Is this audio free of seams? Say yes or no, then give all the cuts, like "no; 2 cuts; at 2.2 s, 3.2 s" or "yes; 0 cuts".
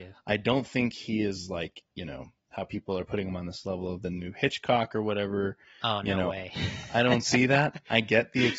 yes; 0 cuts